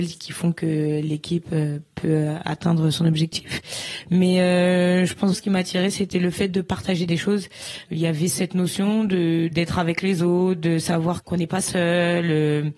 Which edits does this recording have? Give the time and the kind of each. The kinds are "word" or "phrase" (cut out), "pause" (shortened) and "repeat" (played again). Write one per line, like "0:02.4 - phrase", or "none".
0:05.3 - word
0:08.3 - word